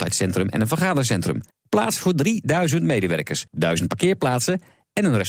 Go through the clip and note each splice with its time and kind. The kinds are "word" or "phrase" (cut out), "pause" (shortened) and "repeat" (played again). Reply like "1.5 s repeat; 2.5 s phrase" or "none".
1.5 s pause; 3.5 s pause

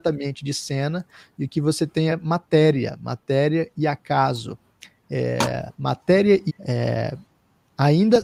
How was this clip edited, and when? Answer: 2.1 s word; 5.7 s pause; 6.5 s word

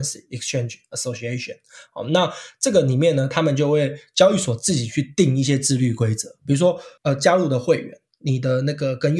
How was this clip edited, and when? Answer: 7.0 s pause

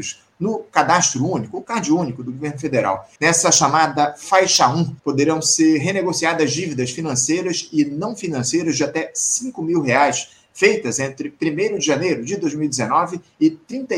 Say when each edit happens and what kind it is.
3.2 s pause; 5.0 s pause

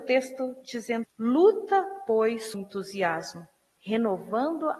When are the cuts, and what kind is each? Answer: 1.0 s word; 2.5 s word

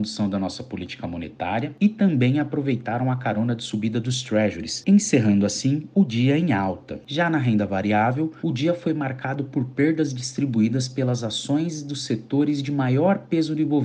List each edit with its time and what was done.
none

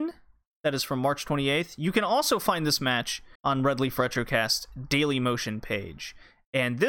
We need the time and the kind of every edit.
3.4 s pause

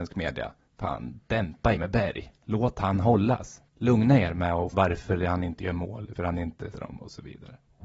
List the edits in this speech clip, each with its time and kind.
1.8 s word; 3.7 s pause; 4.7 s word; 6.2 s word; 6.7 s word

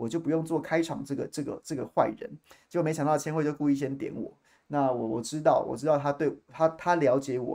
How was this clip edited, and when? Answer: none

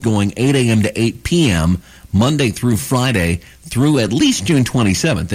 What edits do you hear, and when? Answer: none

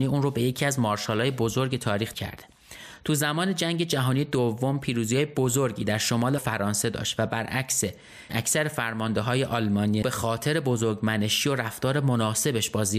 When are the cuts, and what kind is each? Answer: 2.1 s word; 6.4 s phrase; 8.3 s word; 10.0 s phrase

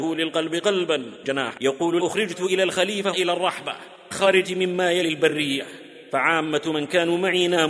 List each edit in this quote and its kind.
1.2 s word; 1.6 s word; 2.0 s word; 3.1 s word; 4.1 s word; 4.4 s word

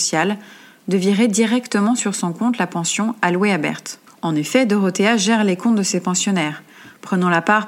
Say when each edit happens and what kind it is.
4.1 s pause

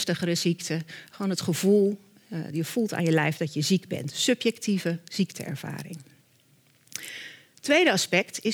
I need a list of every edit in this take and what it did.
none

